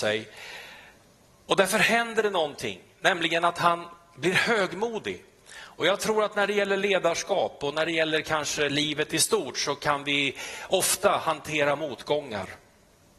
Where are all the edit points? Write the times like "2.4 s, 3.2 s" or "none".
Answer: none